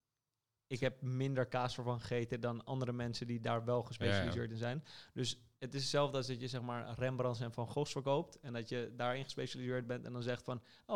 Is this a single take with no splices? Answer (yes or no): yes